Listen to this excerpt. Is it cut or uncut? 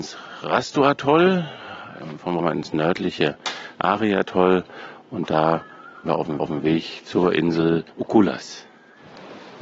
cut